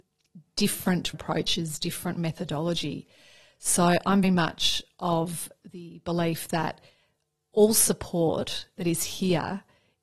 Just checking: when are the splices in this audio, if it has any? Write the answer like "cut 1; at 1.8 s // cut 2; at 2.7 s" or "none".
cut 1; at 1.1 s // cut 2; at 4.2 s